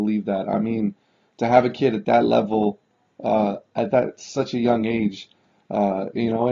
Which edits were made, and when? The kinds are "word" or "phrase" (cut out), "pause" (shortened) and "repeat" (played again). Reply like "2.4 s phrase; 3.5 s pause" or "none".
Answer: none